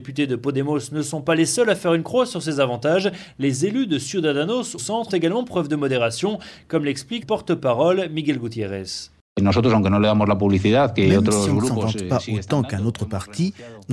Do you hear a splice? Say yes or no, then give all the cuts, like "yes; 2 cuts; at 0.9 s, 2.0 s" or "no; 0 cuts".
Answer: yes; 3 cuts; at 4.8 s, 5.1 s, 7.2 s